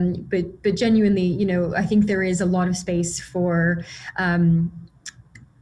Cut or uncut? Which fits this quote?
uncut